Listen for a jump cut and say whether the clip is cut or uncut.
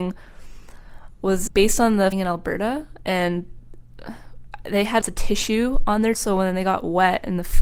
cut